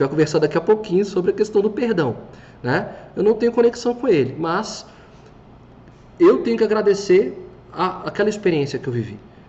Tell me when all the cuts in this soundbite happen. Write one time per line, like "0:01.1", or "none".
0:08.0

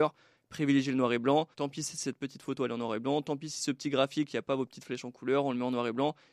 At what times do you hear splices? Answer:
0:01.5

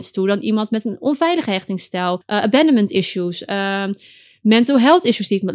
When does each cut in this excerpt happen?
0:02.2

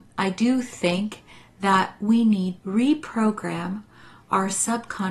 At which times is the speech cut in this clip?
0:02.6

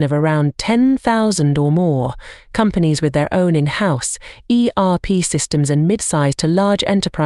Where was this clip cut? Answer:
none

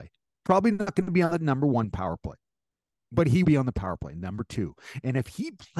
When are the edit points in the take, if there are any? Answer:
0:03.4

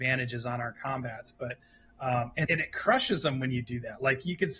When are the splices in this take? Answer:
0:02.4

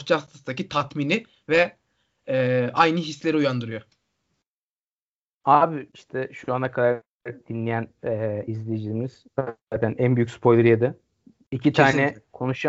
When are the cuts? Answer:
none

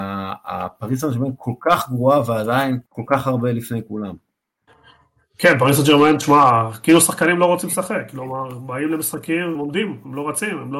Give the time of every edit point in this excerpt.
0:02.9
0:04.7
0:09.6

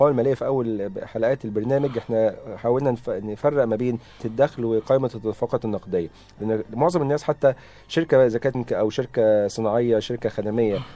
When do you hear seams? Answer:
0:04.2
0:08.5

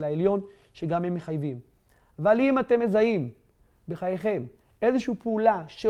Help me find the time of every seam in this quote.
none

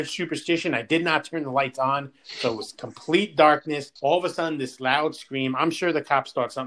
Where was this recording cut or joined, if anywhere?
0:04.0

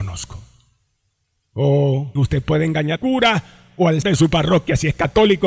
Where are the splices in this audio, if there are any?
0:02.2
0:03.0
0:04.0

